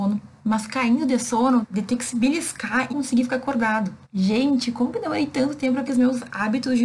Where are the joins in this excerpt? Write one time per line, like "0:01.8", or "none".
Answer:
0:01.6
0:02.9
0:04.0
0:05.9